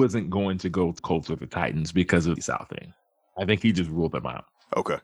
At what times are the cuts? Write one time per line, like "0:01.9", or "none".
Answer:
0:01.0
0:02.4